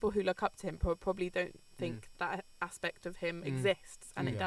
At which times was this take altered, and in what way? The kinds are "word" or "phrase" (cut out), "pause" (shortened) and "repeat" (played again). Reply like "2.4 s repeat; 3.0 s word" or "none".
2.1 s word